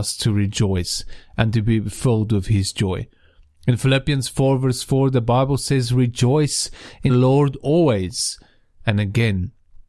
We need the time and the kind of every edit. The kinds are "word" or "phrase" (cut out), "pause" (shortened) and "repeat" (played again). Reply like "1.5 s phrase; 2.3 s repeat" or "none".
7.1 s word